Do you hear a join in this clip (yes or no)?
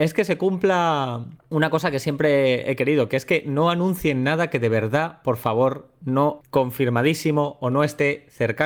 yes